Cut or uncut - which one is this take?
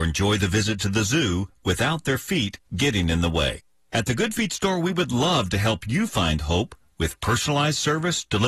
uncut